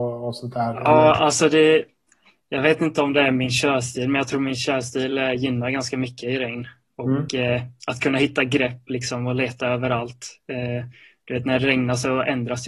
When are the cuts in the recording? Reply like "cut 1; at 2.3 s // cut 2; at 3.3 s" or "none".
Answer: none